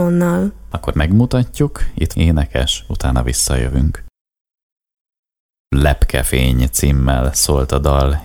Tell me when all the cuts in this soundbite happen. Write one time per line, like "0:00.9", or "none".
0:00.9
0:02.1